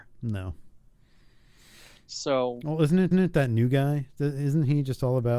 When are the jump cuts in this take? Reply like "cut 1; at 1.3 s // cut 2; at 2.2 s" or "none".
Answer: cut 1; at 3.1 s

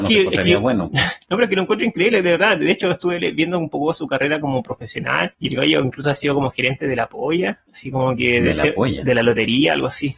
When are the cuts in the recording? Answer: cut 1; at 1.2 s // cut 2; at 5.3 s // cut 3; at 7.7 s

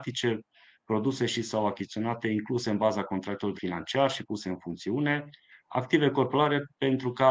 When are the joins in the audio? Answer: cut 1; at 3.6 s

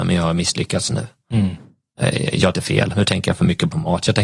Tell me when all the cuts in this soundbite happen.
cut 1; at 2.5 s // cut 2; at 2.9 s

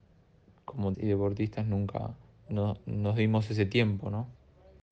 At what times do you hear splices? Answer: cut 1; at 0.9 s // cut 2; at 2.3 s

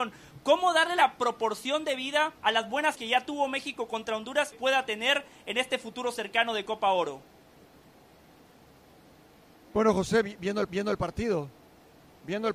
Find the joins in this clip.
cut 1; at 2.4 s // cut 2; at 2.9 s // cut 3; at 4.5 s // cut 4; at 10.7 s

